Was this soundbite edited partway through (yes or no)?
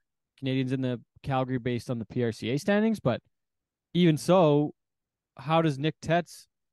no